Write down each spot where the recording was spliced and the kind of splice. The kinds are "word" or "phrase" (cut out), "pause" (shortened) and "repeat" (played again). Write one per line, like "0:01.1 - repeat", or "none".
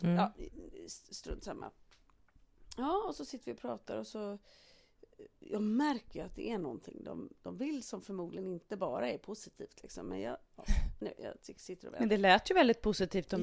0:11.2 - word